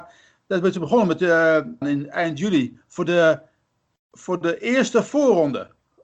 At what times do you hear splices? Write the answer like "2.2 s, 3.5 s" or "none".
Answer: 1.8 s

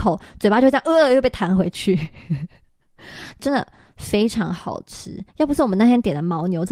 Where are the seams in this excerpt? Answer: 5.3 s

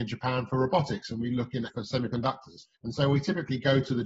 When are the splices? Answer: 1.7 s, 2.8 s

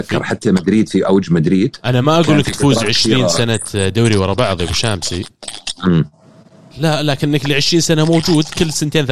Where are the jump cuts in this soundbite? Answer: none

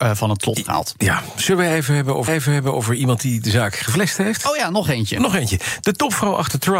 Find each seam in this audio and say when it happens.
2.3 s

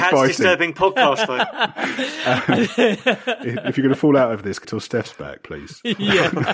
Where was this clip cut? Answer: 4.6 s

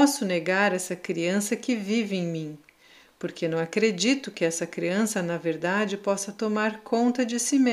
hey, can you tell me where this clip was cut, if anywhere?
none

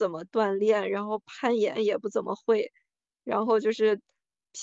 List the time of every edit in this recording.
none

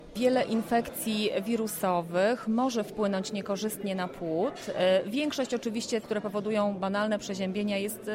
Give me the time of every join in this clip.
6.0 s

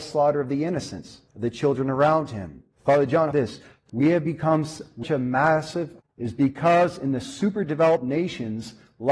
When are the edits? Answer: 1.3 s, 2.7 s, 3.3 s, 3.9 s, 5.0 s, 6.0 s

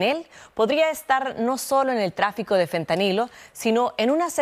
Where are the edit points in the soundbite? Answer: none

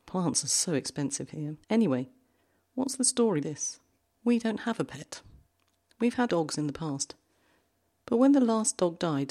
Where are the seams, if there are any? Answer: 1.6 s, 3.4 s, 4.0 s, 6.3 s

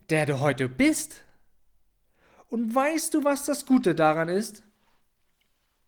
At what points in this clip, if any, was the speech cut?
none

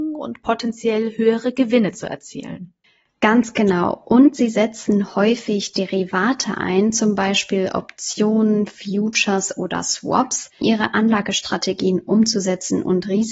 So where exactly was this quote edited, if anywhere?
2.8 s, 10.6 s

